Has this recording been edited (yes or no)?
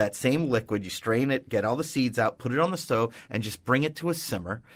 no